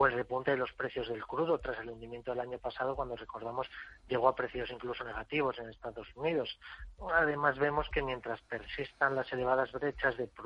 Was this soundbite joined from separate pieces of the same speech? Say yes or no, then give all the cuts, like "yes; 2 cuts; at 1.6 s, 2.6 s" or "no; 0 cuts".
no; 0 cuts